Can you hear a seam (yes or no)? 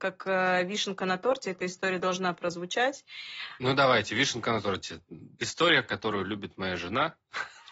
no